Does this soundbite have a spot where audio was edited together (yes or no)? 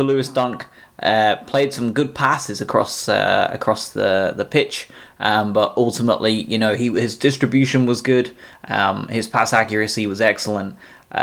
no